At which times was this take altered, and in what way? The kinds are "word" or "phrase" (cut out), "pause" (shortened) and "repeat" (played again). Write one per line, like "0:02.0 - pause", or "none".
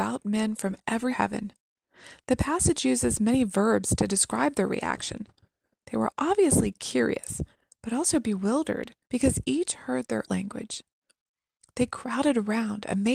0:01.1 - phrase
0:09.0 - pause
0:10.3 - phrase